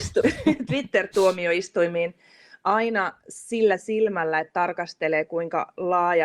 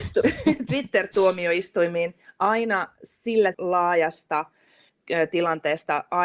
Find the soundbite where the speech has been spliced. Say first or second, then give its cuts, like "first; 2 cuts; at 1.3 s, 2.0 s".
second; 2 cuts; at 2.2 s, 3.5 s